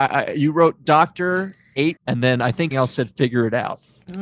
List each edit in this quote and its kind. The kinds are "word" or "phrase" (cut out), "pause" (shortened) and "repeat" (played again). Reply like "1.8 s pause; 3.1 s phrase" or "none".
2.0 s word; 2.7 s word